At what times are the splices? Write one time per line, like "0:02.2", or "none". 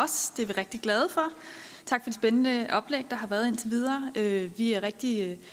0:02.1